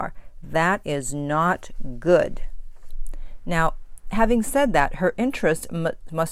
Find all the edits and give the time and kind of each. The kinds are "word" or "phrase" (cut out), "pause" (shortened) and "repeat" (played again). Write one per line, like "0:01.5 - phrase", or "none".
none